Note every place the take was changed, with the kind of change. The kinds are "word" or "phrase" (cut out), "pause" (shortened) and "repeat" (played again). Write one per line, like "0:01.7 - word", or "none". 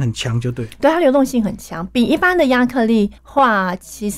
0:03.2 - pause